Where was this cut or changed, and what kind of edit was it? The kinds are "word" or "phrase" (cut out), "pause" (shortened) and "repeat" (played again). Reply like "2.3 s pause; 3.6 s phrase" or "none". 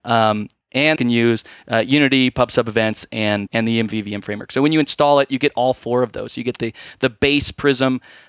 1.0 s word; 3.5 s word